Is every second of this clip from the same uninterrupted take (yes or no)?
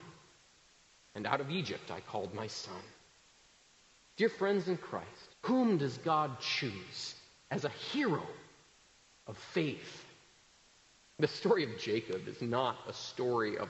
no